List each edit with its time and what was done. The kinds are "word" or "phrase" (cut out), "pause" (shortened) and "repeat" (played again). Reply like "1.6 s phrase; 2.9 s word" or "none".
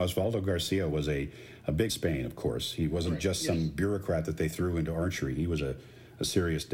1.9 s phrase